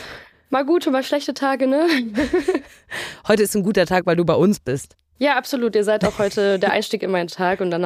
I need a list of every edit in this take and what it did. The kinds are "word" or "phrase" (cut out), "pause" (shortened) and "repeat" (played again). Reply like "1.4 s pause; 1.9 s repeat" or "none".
none